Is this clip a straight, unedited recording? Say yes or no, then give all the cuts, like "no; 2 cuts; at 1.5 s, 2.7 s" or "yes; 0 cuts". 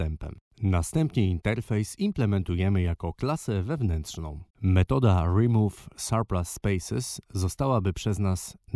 no; 1 cut; at 4.5 s